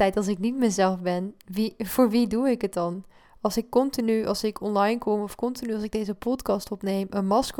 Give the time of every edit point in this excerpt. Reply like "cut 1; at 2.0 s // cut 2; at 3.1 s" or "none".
none